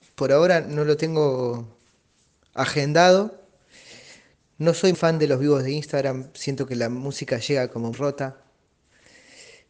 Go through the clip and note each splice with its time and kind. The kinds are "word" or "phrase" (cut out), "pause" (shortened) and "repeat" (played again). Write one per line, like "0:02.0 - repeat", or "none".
0:04.9 - word
0:07.9 - word